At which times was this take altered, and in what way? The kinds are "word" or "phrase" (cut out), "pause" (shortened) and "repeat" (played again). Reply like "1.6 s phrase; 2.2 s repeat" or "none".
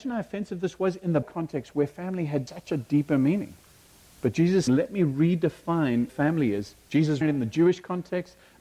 1.2 s word; 2.5 s word; 4.7 s word; 6.1 s word; 7.2 s word